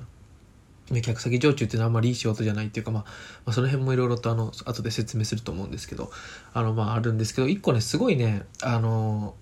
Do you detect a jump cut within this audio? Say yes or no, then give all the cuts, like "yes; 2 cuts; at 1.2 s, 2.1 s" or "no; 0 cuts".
yes; 1 cut; at 8.5 s